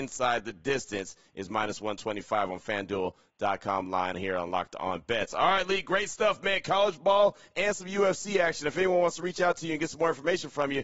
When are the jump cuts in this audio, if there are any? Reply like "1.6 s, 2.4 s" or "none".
4.1 s